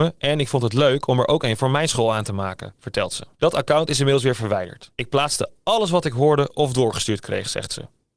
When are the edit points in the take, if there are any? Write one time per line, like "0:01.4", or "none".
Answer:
0:03.3
0:04.9